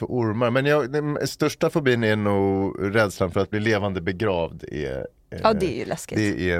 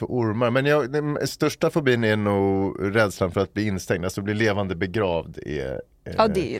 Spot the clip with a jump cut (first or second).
first